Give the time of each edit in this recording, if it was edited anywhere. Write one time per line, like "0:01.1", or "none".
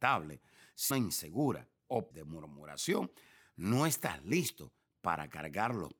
0:00.9
0:02.1